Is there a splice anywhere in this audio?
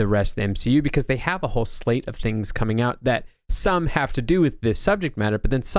no; 0 cuts

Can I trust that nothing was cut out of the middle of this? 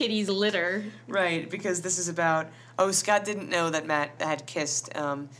no; 1 cut; at 4.2 s

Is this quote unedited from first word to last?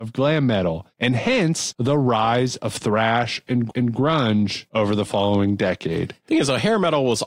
no; 1 cut; at 3.7 s

